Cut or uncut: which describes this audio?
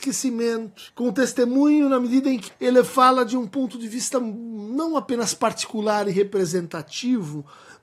cut